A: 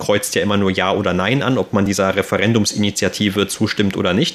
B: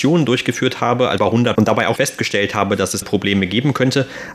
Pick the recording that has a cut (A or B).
B